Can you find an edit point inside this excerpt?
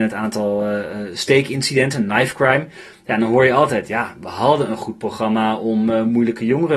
no; 0 cuts

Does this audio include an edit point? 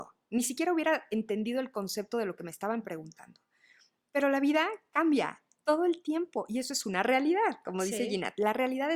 no; 0 cuts

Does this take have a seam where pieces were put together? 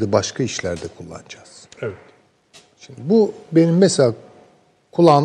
no; 0 cuts

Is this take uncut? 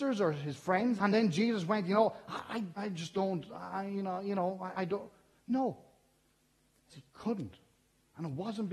no; 4 cuts; at 1.0 s, 2.8 s, 4.7 s, 6.9 s

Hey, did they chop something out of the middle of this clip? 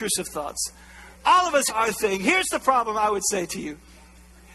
yes; 2 cuts; at 1.1 s, 1.7 s

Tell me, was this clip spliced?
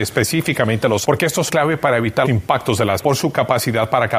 yes; 4 cuts; at 1.0 s, 1.5 s, 2.3 s, 3.0 s

